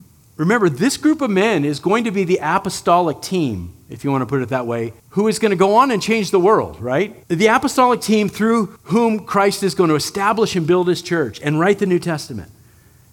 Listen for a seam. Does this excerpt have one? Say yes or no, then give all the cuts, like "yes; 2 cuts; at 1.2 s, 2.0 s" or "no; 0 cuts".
yes; 3 cuts; at 5.0 s, 7.2 s, 8.8 s